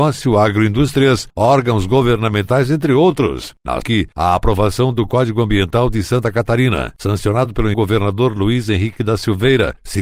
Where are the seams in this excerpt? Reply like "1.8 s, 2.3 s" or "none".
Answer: 3.8 s, 7.7 s